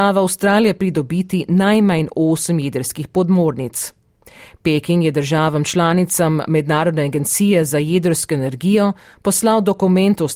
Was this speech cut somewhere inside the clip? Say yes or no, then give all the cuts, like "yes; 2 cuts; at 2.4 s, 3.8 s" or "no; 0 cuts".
no; 0 cuts